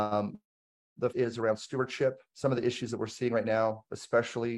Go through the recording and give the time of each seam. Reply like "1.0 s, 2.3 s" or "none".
1.1 s